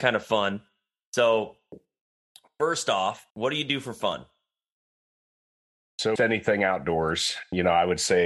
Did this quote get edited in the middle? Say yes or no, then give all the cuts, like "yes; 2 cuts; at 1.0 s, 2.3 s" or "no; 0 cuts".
yes; 2 cuts; at 3.3 s, 6.2 s